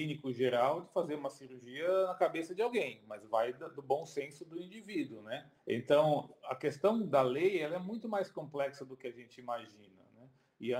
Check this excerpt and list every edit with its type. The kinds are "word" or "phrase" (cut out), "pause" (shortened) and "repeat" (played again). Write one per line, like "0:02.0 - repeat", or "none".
0:05.6 - pause